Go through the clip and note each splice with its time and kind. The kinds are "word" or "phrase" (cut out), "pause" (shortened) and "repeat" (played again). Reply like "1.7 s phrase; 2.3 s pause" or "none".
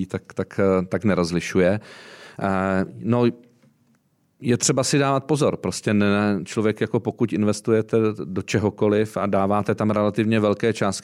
none